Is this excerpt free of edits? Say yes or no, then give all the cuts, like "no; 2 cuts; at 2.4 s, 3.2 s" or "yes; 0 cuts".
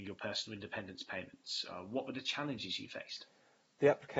yes; 0 cuts